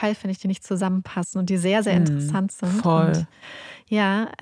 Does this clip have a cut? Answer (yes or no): no